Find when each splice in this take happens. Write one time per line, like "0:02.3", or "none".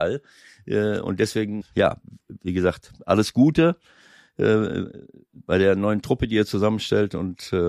0:01.6